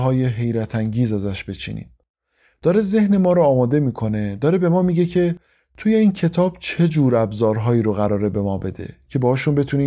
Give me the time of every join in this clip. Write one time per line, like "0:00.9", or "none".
none